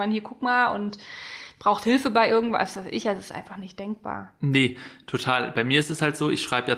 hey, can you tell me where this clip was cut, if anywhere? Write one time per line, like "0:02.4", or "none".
none